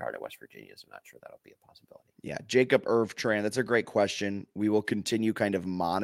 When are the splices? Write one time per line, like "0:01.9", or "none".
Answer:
0:02.1